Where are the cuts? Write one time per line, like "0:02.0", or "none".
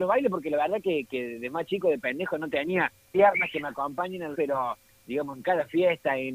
0:03.0
0:04.3